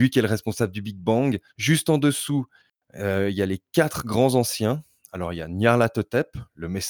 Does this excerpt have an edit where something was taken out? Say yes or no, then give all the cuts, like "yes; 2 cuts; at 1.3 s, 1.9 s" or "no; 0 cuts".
no; 0 cuts